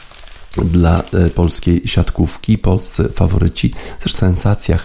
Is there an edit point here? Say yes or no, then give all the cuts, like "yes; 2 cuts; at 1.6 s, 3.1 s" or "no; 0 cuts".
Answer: no; 0 cuts